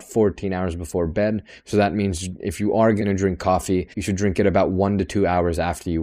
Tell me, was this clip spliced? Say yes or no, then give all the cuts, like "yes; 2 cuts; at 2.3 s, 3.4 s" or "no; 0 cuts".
yes; 1 cut; at 3.9 s